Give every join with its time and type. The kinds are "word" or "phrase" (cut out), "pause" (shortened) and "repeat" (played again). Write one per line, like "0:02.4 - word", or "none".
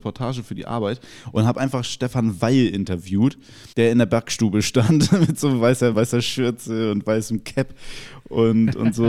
0:03.7 - pause
0:05.9 - phrase